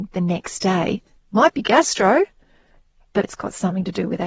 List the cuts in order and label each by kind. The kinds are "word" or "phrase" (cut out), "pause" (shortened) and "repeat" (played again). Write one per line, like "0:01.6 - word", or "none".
0:01.2 - word
0:03.2 - word